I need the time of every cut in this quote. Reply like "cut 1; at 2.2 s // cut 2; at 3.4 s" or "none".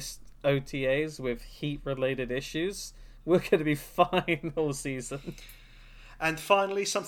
none